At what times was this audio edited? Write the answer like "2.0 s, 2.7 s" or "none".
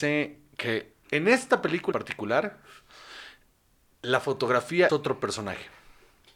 1.0 s, 1.9 s, 4.9 s